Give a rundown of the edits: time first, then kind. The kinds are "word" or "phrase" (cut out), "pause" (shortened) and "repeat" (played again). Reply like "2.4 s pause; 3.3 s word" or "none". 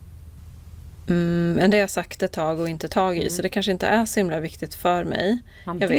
2.9 s word